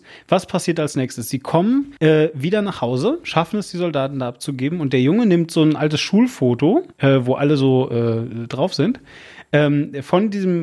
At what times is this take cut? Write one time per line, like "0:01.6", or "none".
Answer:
0:02.0
0:06.9